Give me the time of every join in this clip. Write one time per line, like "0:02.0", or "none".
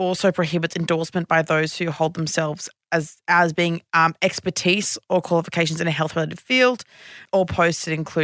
0:03.9